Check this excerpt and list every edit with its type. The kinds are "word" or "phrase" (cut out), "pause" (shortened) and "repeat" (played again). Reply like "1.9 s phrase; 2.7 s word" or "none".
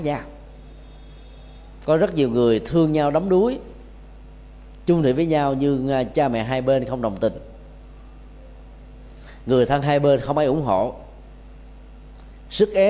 none